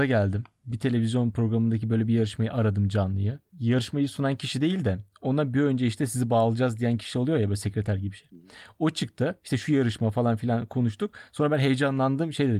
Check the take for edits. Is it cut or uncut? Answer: uncut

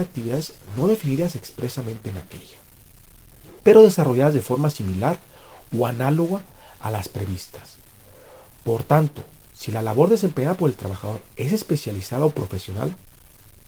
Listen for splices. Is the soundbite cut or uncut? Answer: uncut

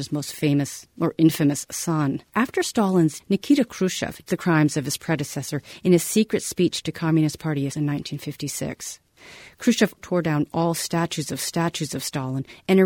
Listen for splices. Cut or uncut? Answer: cut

